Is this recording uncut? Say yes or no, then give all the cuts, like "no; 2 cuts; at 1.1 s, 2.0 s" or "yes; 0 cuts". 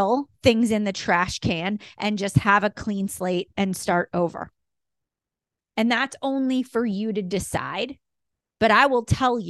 yes; 0 cuts